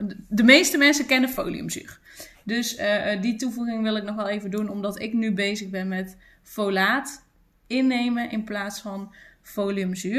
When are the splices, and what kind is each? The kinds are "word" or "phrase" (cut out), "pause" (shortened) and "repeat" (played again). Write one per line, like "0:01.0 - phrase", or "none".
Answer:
none

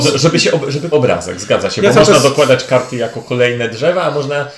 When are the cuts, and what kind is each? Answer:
0:00.9 - word

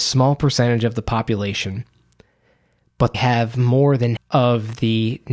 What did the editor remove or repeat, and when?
0:03.1 - word
0:04.2 - word

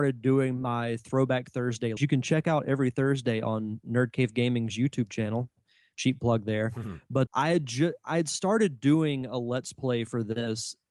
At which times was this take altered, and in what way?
0:02.0 - phrase
0:07.3 - word

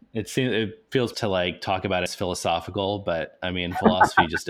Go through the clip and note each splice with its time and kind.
0:01.1 - word
0:02.1 - phrase

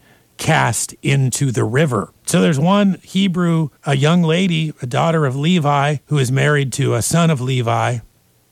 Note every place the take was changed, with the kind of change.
0:02.2 - pause
0:03.8 - pause
0:06.0 - pause

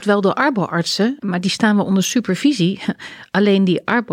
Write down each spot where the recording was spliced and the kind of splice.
0:01.2 - pause

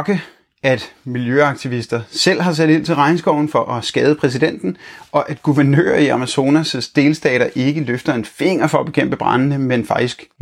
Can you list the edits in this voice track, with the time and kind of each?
none

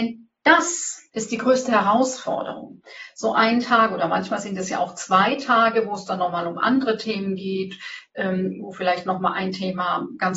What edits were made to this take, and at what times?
0:01.1 - pause

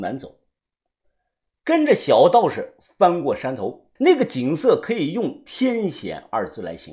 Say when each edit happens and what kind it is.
0:04.0 - pause

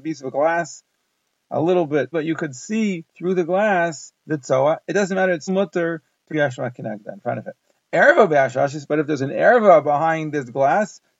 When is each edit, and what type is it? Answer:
0:02.1 - word
0:03.1 - pause
0:05.5 - word
0:06.3 - word

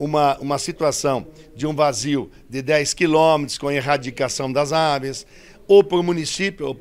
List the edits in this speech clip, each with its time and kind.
none

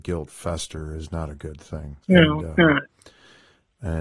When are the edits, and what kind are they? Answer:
0:02.0 - pause

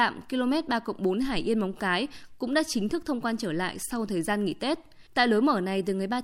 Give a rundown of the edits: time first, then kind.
0:05.1 - pause

